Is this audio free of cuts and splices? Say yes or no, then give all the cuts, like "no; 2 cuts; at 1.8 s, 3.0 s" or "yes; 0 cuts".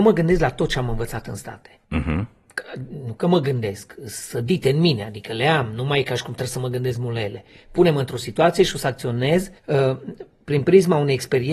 no; 2 cuts; at 1.8 s, 9.6 s